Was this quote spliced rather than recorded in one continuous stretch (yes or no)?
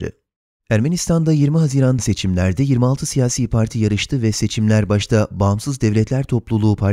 yes